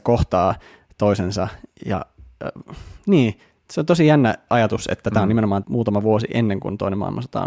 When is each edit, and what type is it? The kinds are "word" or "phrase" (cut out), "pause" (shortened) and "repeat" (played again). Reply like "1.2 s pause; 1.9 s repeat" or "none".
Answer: 5.6 s word